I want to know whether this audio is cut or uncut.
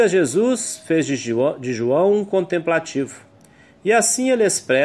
uncut